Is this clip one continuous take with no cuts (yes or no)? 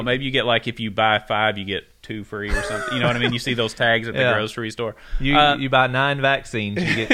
yes